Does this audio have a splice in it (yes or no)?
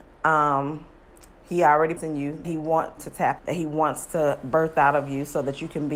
yes